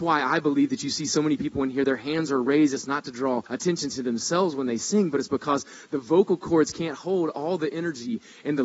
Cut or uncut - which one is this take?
cut